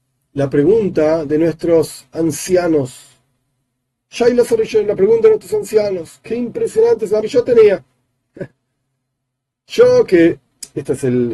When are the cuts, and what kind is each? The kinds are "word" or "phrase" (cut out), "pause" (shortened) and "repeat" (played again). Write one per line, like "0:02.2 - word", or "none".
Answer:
0:07.2 - phrase